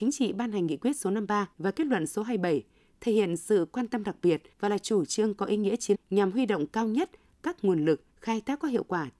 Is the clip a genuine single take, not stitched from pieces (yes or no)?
no